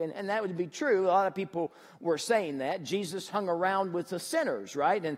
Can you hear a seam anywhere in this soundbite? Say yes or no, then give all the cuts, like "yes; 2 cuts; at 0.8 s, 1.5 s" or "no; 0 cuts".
no; 0 cuts